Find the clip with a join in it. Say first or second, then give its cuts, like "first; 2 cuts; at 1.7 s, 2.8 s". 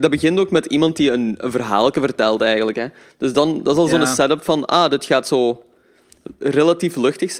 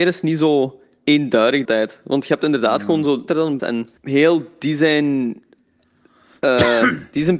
second; 4 cuts; at 1.6 s, 3.3 s, 3.6 s, 4.0 s